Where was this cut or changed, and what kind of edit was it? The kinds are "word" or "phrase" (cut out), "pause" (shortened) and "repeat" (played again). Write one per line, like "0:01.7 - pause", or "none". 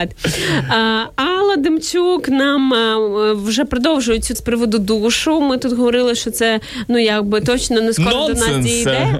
0:04.3 - word